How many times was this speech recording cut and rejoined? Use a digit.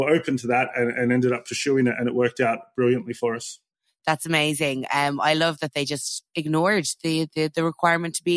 1